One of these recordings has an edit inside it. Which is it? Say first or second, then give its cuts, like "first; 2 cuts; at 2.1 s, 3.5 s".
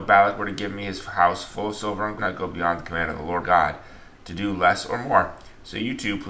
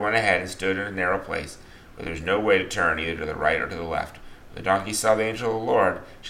first; 2 cuts; at 2.2 s, 3.4 s